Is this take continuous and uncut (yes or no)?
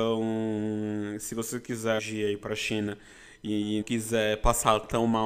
no